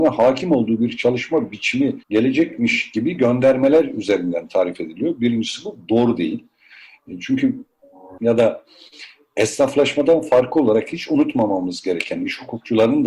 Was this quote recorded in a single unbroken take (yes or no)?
no